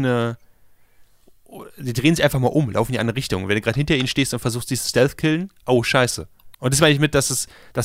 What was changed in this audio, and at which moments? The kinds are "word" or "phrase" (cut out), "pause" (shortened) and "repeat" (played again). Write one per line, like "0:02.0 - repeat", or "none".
0:06.5 - pause